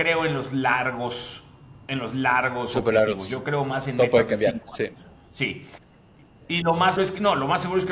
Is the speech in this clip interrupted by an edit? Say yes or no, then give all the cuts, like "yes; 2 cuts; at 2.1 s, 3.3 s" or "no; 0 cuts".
yes; 1 cut; at 7.0 s